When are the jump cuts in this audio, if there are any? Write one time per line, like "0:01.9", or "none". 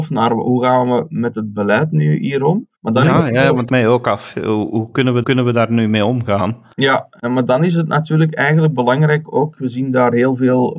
0:02.7
0:03.7
0:05.2
0:06.7